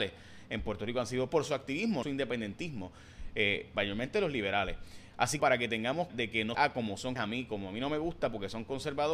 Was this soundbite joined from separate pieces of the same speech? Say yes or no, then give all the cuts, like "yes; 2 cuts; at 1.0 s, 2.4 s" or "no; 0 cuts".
yes; 6 cuts; at 1.3 s, 2.0 s, 5.4 s, 6.1 s, 6.5 s, 7.2 s